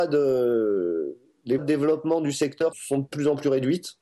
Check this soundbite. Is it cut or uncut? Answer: cut